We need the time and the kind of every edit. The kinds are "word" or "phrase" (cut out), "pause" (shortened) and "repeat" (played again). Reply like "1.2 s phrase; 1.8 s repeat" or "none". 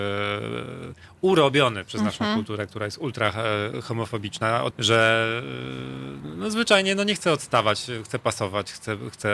4.7 s word